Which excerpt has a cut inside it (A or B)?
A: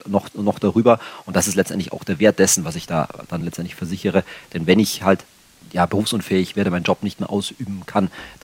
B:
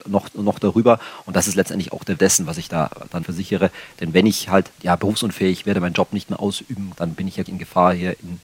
B